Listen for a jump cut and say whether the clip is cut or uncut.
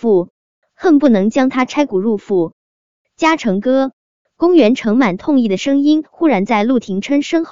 uncut